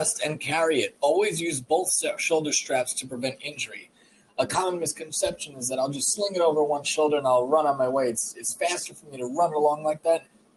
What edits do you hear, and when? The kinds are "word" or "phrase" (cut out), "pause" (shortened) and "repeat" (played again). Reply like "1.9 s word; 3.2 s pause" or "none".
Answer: none

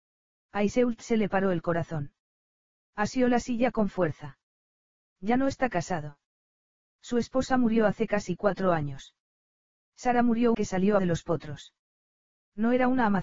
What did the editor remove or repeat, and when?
10.5 s phrase; 11.0 s phrase

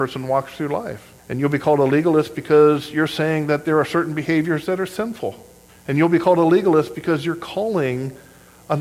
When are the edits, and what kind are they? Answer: 1.2 s pause; 5.7 s pause

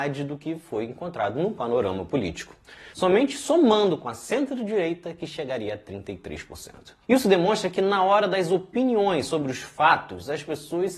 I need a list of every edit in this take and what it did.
2.9 s pause; 7.0 s pause

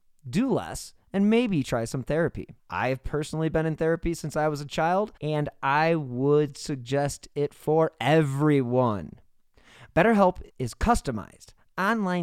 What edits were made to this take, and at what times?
2.6 s pause; 5.2 s pause; 10.5 s pause

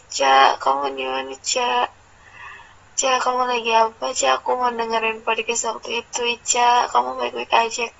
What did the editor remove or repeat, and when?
none

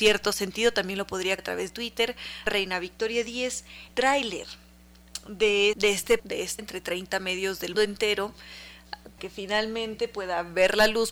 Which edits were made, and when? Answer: 1.4 s word; 1.7 s word; 2.5 s word; 3.9 s word; 5.7 s word; 6.2 s word; 6.6 s word; 7.7 s word; 9.2 s word

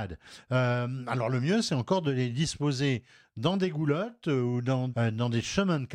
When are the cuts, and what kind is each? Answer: 4.9 s word

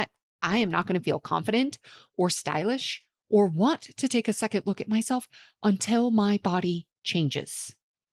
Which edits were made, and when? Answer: none

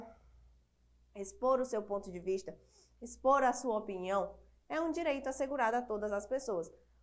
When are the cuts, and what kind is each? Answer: none

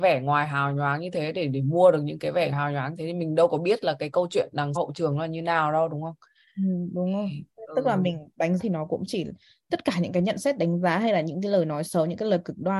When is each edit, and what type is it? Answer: 2.5 s word; 4.8 s word; 8.6 s word

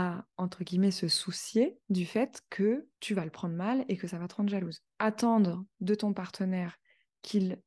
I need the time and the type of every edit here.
1.8 s pause; 2.9 s pause; 4.9 s pause

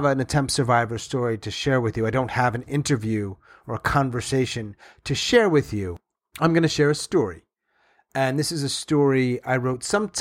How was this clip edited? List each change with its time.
none

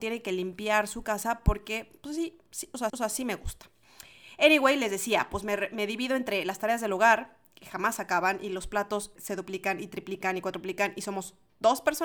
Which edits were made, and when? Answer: 2.9 s repeat; 9.2 s word

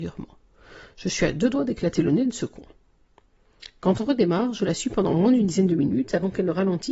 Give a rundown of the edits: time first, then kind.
none

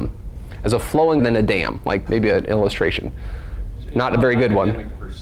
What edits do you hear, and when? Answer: 1.2 s word; 2.1 s word

